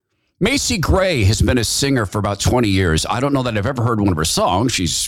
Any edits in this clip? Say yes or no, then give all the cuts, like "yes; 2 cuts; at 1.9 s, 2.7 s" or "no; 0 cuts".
no; 0 cuts